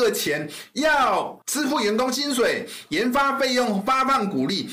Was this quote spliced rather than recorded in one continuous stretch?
yes; 1 cut; at 1.4 s

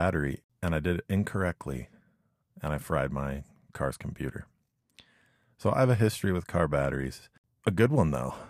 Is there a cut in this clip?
no; 0 cuts

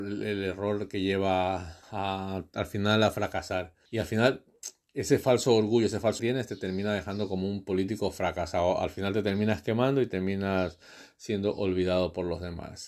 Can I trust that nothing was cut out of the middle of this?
no; 3 cuts; at 1.8 s, 3.9 s, 6.2 s

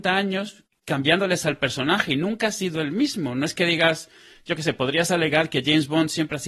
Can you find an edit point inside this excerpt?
no; 0 cuts

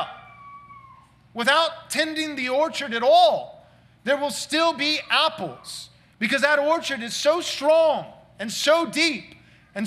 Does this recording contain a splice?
no; 0 cuts

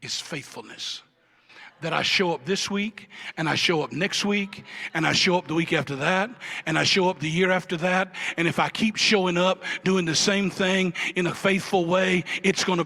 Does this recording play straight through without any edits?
yes; 0 cuts

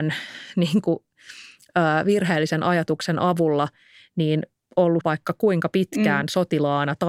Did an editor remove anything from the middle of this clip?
yes; 1 cut; at 5.0 s

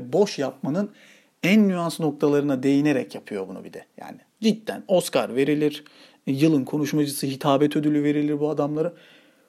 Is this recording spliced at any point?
no; 0 cuts

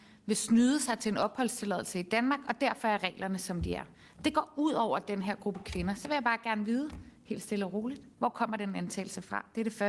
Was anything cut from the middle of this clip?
yes; 2 cuts; at 3.9 s, 8.1 s

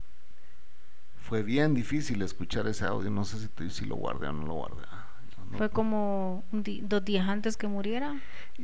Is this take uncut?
yes; 0 cuts

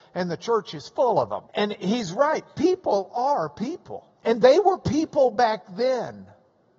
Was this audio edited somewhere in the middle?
yes; 2 cuts; at 1.5 s, 4.2 s

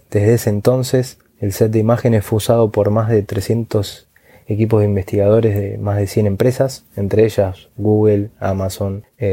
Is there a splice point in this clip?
no; 0 cuts

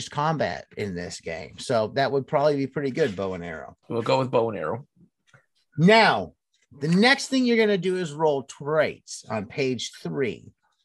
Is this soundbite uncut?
yes; 0 cuts

